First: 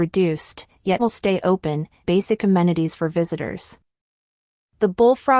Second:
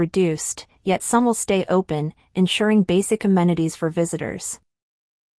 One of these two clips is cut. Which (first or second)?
first